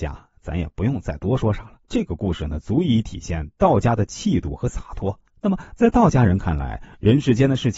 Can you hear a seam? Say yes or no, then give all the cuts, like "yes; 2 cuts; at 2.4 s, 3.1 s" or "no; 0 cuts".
yes; 2 cuts; at 1.8 s, 5.3 s